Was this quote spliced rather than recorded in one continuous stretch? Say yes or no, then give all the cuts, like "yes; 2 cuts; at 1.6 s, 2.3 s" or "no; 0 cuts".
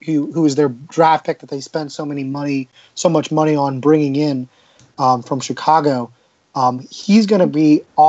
no; 0 cuts